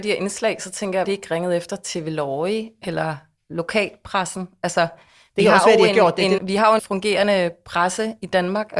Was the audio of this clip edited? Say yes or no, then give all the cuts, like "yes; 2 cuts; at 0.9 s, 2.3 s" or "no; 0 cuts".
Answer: yes; 3 cuts; at 1.0 s, 6.4 s, 6.8 s